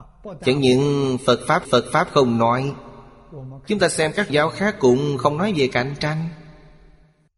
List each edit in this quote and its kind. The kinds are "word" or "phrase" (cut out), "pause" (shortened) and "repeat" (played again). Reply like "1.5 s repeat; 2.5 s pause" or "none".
1.6 s repeat; 4.3 s word